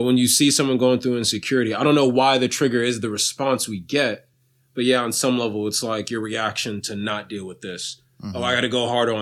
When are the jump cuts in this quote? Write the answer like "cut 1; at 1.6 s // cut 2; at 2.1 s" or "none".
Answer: none